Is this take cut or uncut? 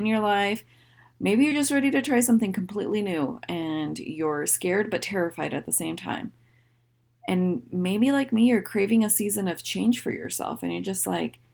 uncut